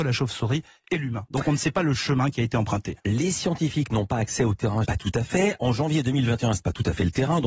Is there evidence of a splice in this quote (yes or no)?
yes